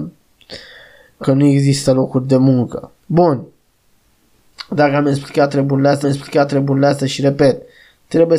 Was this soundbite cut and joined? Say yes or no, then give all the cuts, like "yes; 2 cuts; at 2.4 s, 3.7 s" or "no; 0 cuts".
yes; 3 cuts; at 1.2 s, 3.0 s, 6.0 s